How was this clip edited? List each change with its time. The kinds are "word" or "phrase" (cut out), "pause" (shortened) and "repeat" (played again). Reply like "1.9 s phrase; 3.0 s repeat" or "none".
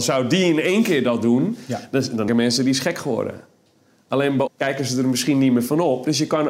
2.3 s word; 4.5 s word

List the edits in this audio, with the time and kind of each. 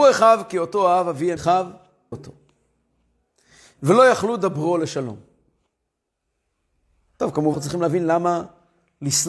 1.4 s word; 2.1 s word; 7.5 s word

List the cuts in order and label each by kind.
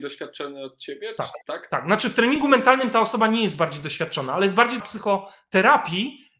4.8 s word

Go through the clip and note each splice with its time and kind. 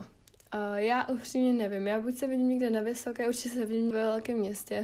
3.9 s word

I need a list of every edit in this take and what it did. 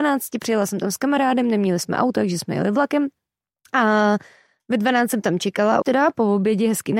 5.8 s word

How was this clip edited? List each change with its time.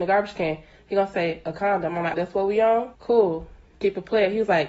2.1 s word; 2.9 s pause

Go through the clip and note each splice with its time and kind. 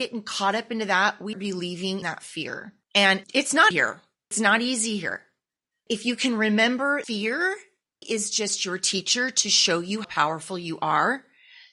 1.3 s word; 2.0 s word; 3.2 s word; 3.7 s word; 4.3 s word; 5.9 s word; 7.0 s word; 8.0 s word; 10.0 s word

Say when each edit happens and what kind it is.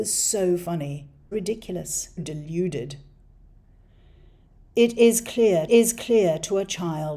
1.3 s word; 2.2 s word; 5.7 s repeat

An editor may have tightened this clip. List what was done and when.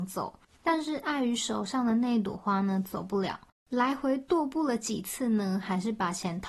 none

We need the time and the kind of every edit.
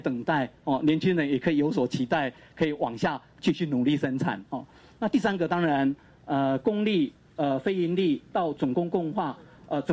none

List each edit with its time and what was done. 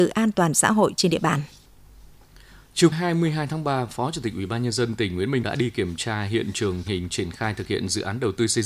2.9 s word; 5.4 s word; 6.9 s word

